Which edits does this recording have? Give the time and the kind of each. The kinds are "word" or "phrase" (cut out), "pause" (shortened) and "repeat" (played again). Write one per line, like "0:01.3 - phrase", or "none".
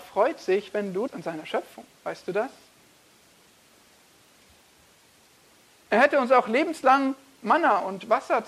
0:01.1 - phrase
0:02.0 - pause